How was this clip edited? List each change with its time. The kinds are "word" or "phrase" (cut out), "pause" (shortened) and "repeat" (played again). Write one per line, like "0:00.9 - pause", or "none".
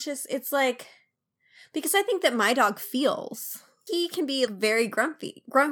0:03.9 - word
0:04.5 - word